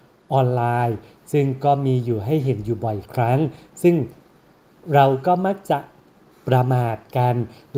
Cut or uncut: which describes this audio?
uncut